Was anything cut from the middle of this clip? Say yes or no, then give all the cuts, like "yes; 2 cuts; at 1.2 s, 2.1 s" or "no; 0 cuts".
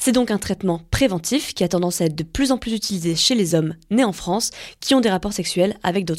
no; 0 cuts